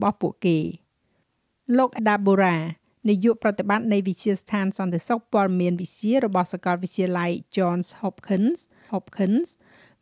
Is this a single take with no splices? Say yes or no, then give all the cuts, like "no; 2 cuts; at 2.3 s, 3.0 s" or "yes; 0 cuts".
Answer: no; 2 cuts; at 2.0 s, 8.9 s